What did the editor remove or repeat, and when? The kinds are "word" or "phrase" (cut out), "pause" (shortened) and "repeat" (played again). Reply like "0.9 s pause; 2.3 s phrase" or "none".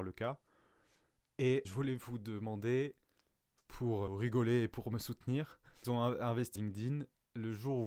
1.6 s word; 4.1 s word; 5.8 s phrase; 6.6 s word